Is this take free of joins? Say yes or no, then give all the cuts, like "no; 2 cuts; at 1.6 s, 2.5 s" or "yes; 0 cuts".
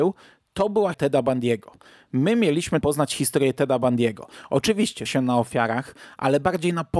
no; 3 cuts; at 0.9 s, 2.8 s, 5.1 s